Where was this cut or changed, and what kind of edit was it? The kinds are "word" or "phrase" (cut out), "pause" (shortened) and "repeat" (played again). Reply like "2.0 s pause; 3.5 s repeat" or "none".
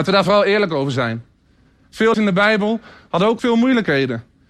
2.1 s word; 3.4 s word

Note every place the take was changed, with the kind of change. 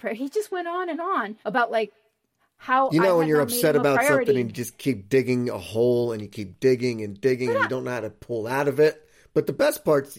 1.4 s pause

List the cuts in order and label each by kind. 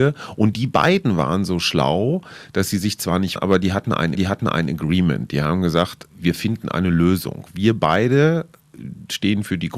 3.4 s word; 4.1 s repeat; 6.1 s pause

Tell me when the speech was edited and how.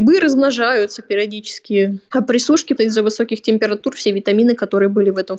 2.8 s word

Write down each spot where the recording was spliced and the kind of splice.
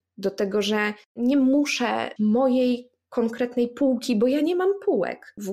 1.0 s pause; 2.2 s phrase

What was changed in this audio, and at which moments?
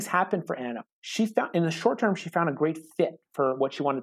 0.9 s pause

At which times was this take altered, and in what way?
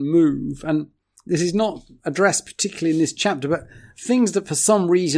none

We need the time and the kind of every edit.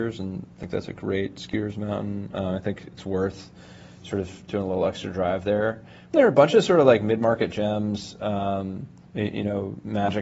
6.1 s word; 9.0 s pause

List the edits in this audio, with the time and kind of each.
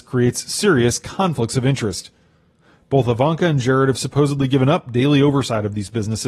none

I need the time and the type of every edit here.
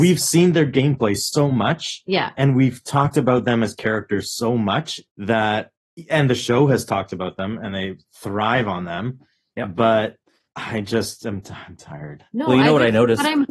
5.1 s pause

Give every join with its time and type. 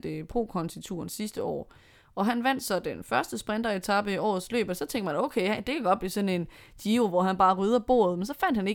none

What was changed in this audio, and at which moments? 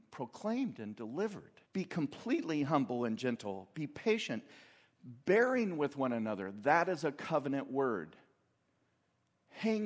1.6 s pause

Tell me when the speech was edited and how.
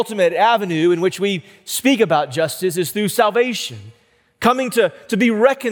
none

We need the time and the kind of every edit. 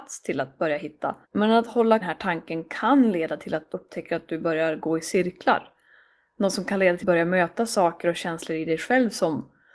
1.2 s pause; 2.0 s phrase; 3.7 s word; 7.0 s phrase

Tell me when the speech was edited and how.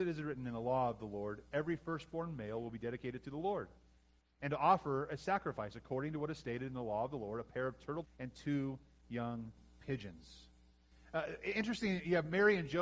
8.0 s word

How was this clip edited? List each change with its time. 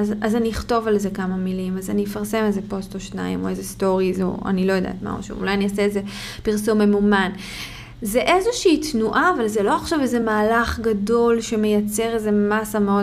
none

